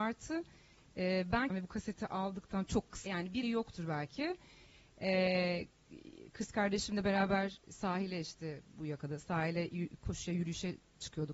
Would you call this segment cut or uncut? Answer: cut